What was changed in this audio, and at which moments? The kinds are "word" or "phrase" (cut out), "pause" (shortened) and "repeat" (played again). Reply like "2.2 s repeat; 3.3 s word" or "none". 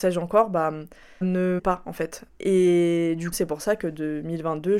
1.2 s word; 1.6 s word; 3.3 s word